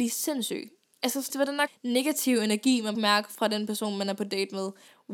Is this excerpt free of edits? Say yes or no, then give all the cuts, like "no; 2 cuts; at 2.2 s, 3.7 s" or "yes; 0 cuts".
no; 3 cuts; at 1.3 s, 1.7 s, 2.9 s